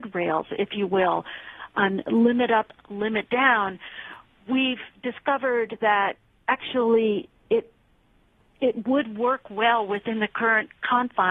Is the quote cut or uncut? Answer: uncut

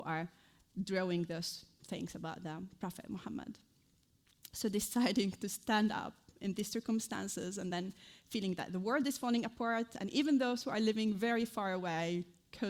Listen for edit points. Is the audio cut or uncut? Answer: uncut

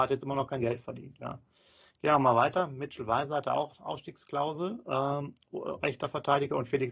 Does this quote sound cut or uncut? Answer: uncut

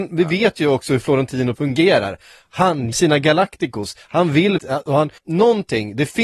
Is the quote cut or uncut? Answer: cut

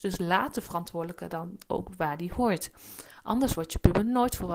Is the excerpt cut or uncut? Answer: uncut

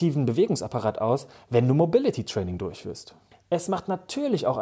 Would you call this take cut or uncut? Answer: cut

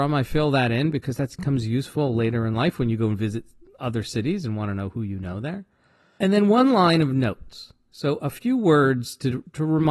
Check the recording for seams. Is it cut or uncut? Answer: uncut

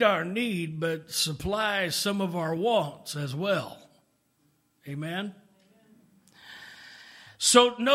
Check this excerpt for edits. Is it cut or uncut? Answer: uncut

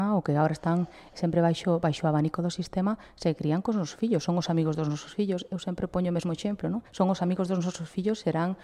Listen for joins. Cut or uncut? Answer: cut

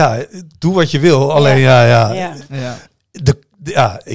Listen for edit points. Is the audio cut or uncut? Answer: uncut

